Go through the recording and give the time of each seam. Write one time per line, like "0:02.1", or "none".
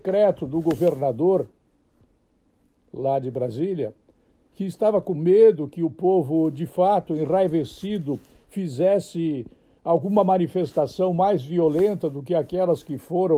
none